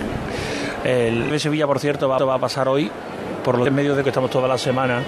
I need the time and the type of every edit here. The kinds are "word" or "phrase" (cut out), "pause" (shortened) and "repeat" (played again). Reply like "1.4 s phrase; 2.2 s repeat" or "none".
1.3 s word; 2.2 s repeat; 3.7 s word; 4.0 s word

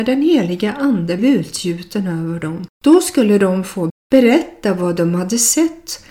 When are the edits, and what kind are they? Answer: 1.2 s word; 2.7 s pause; 3.9 s phrase

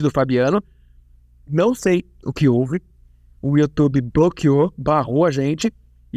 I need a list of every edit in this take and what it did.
none

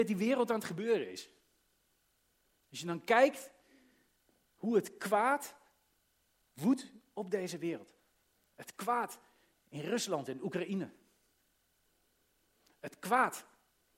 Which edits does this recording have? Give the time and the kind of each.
none

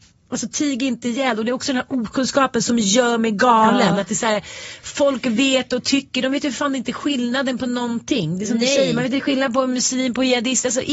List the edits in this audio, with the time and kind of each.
none

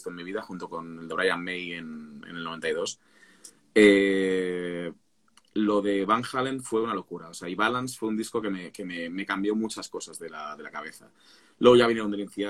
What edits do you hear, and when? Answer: none

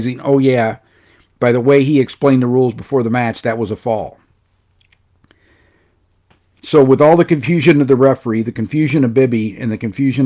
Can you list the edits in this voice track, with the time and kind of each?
none

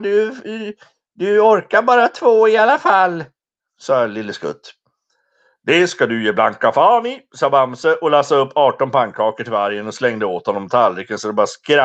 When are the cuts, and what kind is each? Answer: none

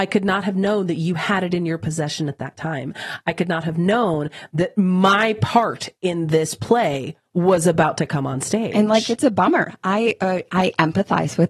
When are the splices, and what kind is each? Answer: 7.3 s pause

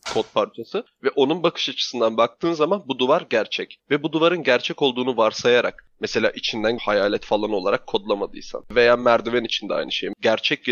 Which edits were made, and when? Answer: 6.8 s word

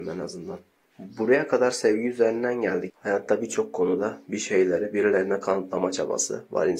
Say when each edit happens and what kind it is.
2.9 s word

